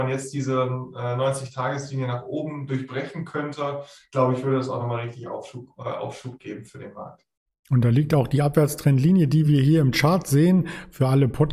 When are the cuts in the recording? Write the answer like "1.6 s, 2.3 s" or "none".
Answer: none

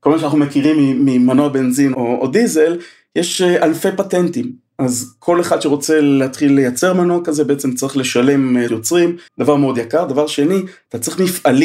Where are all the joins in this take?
1.9 s, 8.7 s, 9.3 s

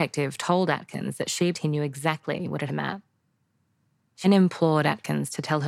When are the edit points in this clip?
1.5 s, 2.7 s, 4.2 s

